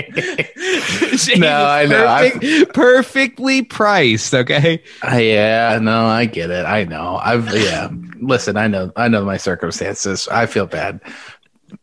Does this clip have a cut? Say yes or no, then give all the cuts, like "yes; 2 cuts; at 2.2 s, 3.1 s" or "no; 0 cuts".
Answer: no; 0 cuts